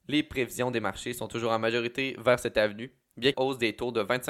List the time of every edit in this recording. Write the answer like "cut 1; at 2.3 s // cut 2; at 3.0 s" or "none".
cut 1; at 3.3 s